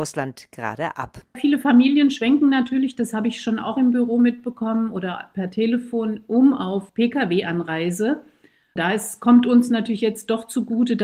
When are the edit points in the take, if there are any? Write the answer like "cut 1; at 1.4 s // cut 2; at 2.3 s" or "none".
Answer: cut 1; at 6.9 s